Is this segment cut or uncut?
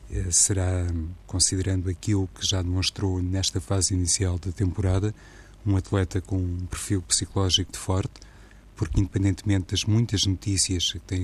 cut